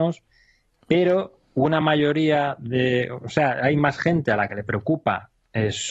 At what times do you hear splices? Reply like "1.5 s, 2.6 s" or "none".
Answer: none